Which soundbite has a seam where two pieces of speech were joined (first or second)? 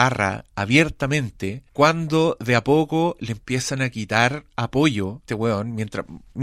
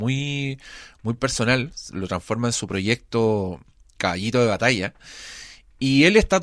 first